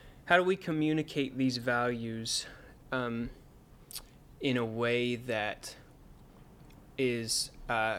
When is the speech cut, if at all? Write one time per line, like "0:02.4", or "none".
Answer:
none